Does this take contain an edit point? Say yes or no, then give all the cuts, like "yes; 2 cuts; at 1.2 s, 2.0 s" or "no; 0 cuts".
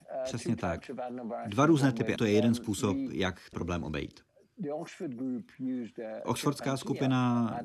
yes; 2 cuts; at 2.2 s, 3.5 s